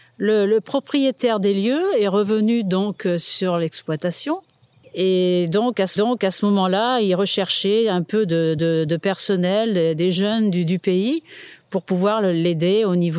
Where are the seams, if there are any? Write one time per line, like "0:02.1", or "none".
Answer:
0:04.7
0:06.0
0:08.6